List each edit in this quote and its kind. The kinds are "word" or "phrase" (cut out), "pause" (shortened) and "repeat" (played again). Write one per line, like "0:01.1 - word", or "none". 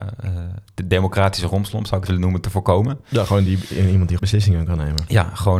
0:02.1 - word
0:04.2 - word